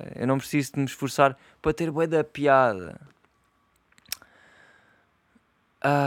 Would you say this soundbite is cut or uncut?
uncut